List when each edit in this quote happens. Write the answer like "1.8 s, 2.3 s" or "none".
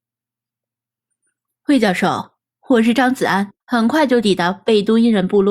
3.6 s